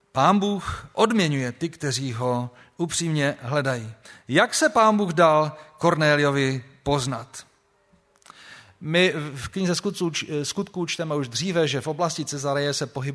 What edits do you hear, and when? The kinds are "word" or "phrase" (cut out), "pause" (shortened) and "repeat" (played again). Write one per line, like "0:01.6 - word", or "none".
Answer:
none